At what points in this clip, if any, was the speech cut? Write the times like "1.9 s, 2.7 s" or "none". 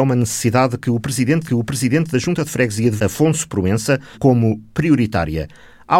1.5 s, 3.0 s, 4.1 s